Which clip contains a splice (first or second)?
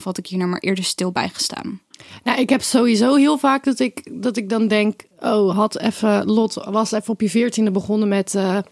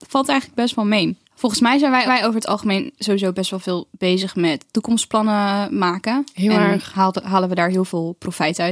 second